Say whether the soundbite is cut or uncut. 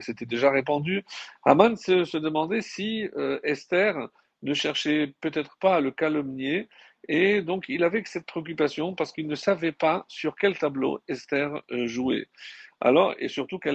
uncut